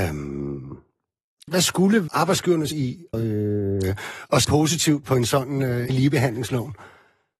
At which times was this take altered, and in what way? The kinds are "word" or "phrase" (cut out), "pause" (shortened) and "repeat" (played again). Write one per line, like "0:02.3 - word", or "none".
0:01.5 - word
0:02.1 - word
0:02.7 - word
0:03.1 - word
0:04.4 - word
0:05.0 - word
0:05.9 - word